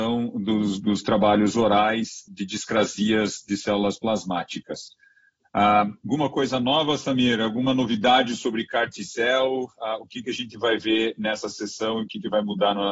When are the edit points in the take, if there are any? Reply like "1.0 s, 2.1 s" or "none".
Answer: 2.3 s

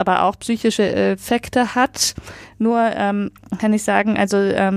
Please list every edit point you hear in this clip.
none

